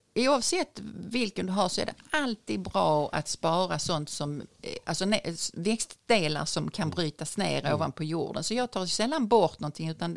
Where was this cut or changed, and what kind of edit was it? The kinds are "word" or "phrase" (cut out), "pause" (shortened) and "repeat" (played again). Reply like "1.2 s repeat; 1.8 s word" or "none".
none